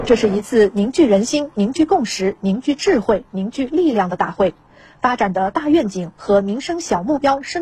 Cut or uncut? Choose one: uncut